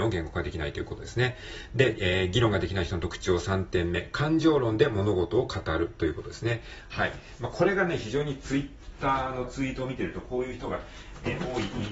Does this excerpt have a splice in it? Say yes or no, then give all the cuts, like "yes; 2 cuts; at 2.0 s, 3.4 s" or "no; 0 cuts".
yes; 1 cut; at 1.9 s